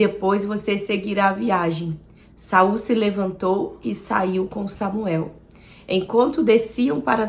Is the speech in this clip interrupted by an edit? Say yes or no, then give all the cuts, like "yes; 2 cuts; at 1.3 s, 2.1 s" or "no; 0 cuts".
no; 0 cuts